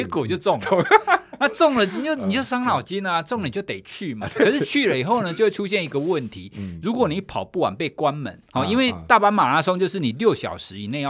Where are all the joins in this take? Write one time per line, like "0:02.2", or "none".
0:08.5